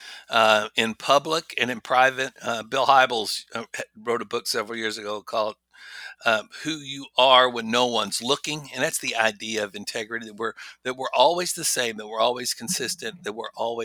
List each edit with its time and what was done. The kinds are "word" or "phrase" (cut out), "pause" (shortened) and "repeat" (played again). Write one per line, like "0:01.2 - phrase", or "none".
0:02.4 - pause